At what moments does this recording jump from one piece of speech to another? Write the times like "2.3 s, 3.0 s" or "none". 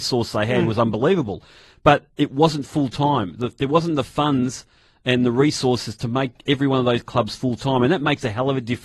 none